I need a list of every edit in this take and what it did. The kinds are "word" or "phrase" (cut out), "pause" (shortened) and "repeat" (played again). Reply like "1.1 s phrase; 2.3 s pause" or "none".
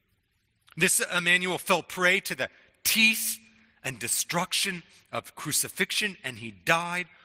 none